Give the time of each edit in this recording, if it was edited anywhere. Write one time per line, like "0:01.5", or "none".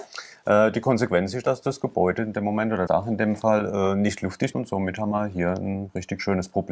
0:02.9
0:04.5